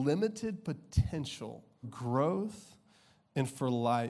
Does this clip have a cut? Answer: yes; 1 cut; at 1.8 s

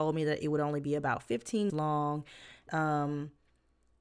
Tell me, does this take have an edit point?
yes; 2 cuts; at 1.7 s, 2.7 s

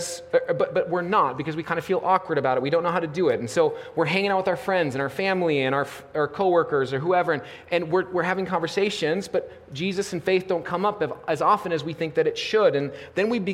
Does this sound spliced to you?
no; 0 cuts

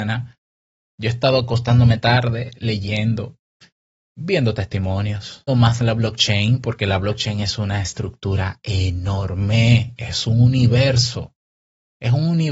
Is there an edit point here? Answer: yes; 1 cut; at 5.5 s

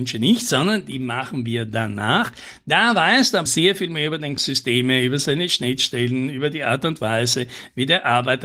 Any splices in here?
yes; 2 cuts; at 3.5 s, 4.4 s

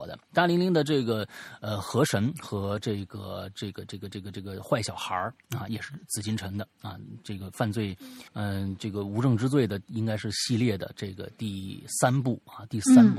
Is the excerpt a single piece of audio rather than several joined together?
no; 1 cut; at 8.3 s

